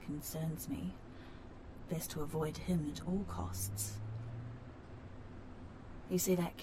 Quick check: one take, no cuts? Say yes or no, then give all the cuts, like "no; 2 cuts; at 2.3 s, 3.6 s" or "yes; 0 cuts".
yes; 0 cuts